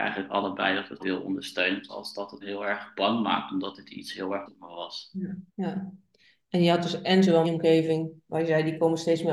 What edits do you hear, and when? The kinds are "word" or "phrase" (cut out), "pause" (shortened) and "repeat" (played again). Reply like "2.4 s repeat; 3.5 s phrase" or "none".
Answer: 1.0 s word; 1.9 s word; 2.4 s word; 4.5 s word; 5.5 s pause; 7.4 s phrase